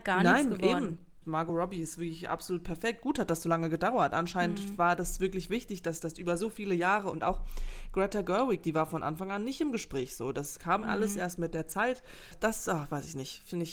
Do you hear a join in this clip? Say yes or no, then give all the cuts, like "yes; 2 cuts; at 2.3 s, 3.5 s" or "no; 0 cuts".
no; 0 cuts